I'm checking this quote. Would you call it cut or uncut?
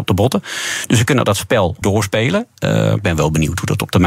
cut